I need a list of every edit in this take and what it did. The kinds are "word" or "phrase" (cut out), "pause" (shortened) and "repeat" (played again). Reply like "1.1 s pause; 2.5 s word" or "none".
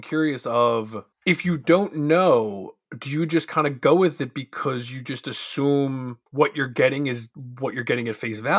1.1 s pause; 2.9 s pause; 6.3 s pause